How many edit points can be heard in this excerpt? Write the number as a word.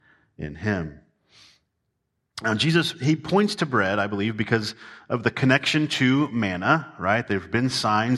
zero